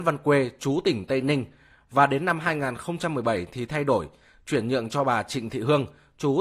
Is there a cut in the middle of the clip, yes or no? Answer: no